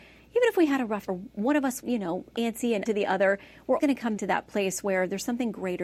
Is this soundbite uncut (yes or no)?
no